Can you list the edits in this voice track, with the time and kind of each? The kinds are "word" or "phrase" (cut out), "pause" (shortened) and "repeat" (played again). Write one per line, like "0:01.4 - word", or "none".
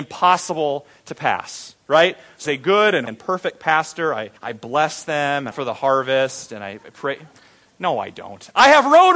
0:02.5 - word
0:03.1 - word
0:04.4 - pause
0:05.5 - phrase